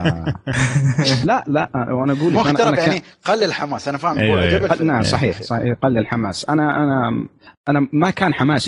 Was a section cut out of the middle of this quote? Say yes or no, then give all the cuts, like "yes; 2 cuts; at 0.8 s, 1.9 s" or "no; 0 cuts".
no; 0 cuts